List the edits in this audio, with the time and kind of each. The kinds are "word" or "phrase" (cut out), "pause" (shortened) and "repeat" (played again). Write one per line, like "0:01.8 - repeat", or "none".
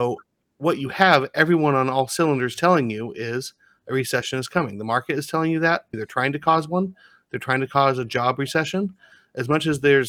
0:05.9 - phrase